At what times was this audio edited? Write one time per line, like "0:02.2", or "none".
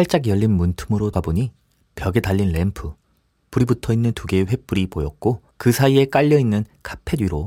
0:01.1
0:05.5